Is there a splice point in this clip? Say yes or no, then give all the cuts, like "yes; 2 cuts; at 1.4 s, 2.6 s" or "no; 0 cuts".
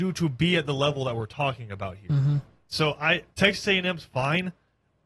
yes; 1 cut; at 3.3 s